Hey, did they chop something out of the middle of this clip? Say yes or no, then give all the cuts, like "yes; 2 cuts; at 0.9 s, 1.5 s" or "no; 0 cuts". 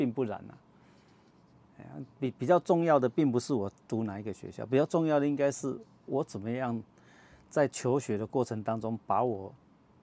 no; 0 cuts